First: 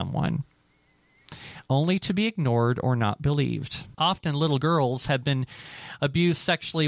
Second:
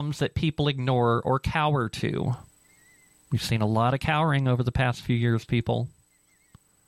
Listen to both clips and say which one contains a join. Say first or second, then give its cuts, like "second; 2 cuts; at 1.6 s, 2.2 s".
first; 1 cut; at 3.9 s